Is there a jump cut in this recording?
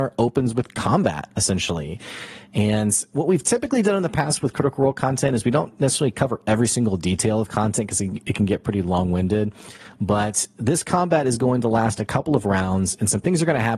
no; 0 cuts

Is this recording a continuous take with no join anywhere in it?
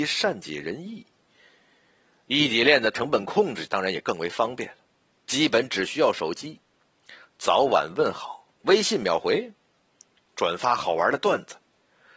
no; 1 cut; at 8.5 s

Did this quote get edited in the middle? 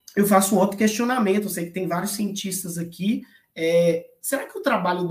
no; 0 cuts

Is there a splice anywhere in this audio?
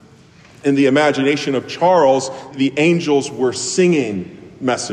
yes; 1 cut; at 2.5 s

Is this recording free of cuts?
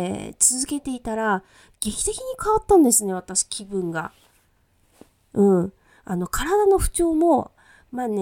yes; 0 cuts

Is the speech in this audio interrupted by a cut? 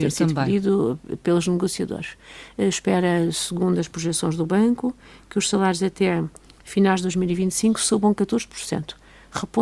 no; 0 cuts

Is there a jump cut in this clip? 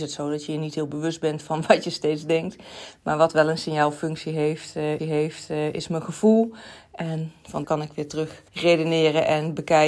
yes; 3 cuts; at 5.0 s, 7.6 s, 8.5 s

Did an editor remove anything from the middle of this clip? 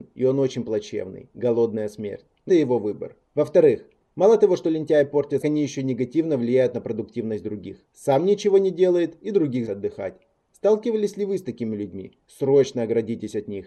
yes; 5 cuts; at 2.5 s, 3.3 s, 5.4 s, 7.9 s, 9.7 s

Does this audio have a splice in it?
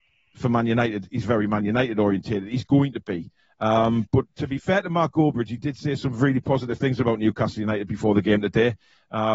no; 0 cuts

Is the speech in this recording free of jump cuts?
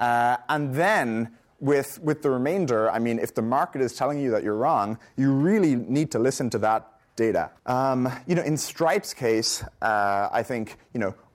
no; 1 cut; at 7.6 s

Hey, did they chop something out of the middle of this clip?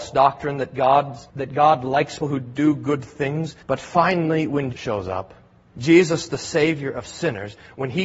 yes; 5 cuts; at 1.3 s, 2.2 s, 3.6 s, 4.7 s, 5.6 s

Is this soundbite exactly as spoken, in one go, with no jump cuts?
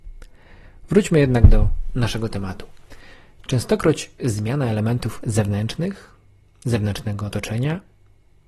yes; 0 cuts

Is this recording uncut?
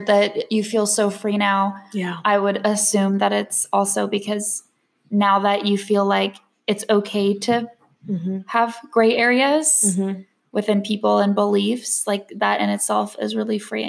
yes; 0 cuts

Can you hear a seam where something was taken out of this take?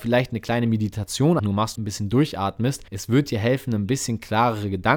yes; 3 cuts; at 1.4 s, 1.7 s, 2.9 s

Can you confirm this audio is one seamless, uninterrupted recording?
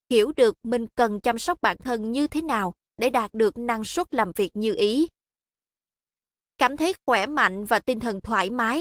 yes; 0 cuts

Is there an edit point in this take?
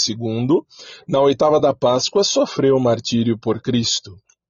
no; 0 cuts

